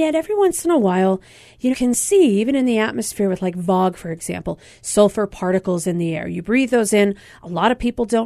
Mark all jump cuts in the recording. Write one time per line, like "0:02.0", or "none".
0:01.7